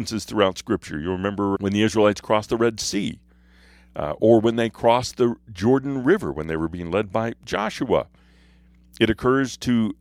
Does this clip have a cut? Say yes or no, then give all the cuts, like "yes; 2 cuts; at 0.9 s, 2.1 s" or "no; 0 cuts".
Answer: yes; 1 cut; at 1.5 s